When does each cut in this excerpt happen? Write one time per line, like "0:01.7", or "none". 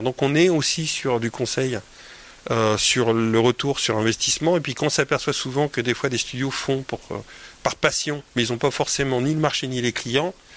0:08.3